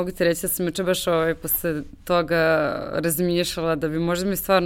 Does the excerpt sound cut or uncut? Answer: uncut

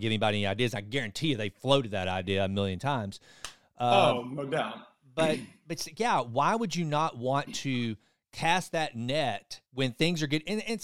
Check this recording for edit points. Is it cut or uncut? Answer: cut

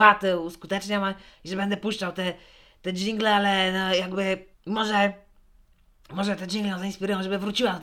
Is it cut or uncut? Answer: cut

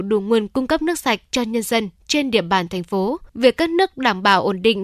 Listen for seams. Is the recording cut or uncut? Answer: cut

